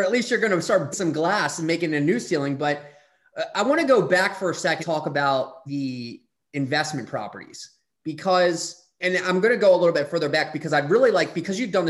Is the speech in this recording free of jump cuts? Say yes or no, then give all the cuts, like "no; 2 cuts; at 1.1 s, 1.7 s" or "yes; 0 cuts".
no; 4 cuts; at 0.9 s, 4.8 s, 5.7 s, 9.0 s